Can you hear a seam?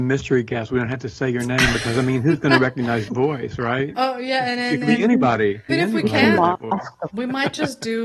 yes; 3 cuts; at 3.1 s, 5.7 s, 7.1 s

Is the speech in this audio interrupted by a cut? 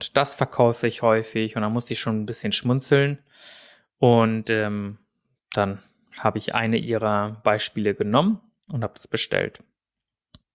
no; 0 cuts

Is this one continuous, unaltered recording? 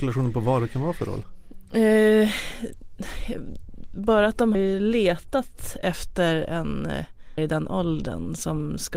no; 2 cuts; at 4.5 s, 7.4 s

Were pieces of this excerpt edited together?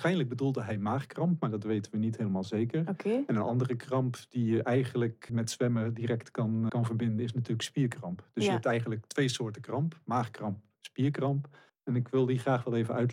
yes; 3 cuts; at 5.3 s, 6.7 s, 11.7 s

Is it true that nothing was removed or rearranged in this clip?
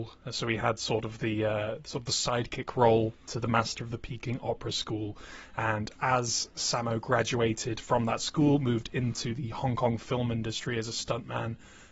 yes; 0 cuts

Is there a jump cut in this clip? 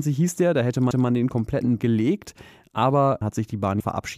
yes; 3 cuts; at 0.9 s, 1.8 s, 3.2 s

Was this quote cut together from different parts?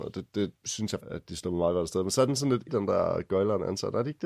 yes; 2 cuts; at 1.0 s, 2.7 s

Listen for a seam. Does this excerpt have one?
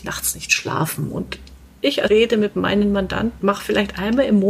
yes; 2 cuts; at 2.1 s, 3.4 s

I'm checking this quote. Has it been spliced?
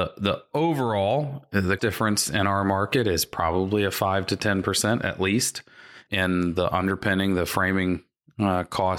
yes; 2 cuts; at 1.8 s, 6.1 s

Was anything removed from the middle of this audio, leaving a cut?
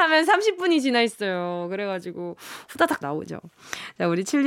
yes; 1 cut; at 3.0 s

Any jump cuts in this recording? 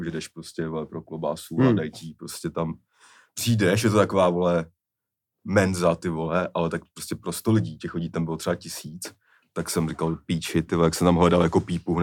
no; 0 cuts

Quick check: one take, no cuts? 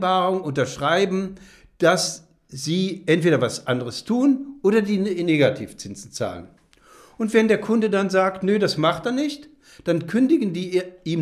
yes; 0 cuts

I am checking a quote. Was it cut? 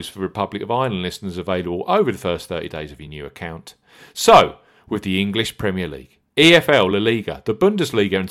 no; 0 cuts

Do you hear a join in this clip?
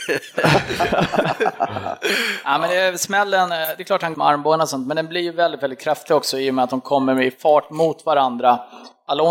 yes; 1 cut; at 4.1 s

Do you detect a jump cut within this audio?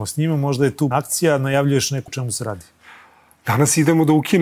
yes; 2 cuts; at 0.9 s, 2.1 s

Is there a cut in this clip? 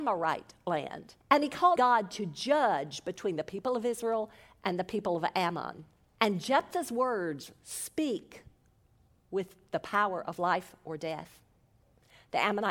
yes; 3 cuts; at 1.2 s, 1.8 s, 6.1 s

